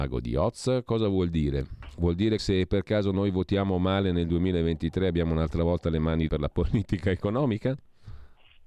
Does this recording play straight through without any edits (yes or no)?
no